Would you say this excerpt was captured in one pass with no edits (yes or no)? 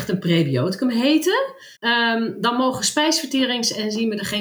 no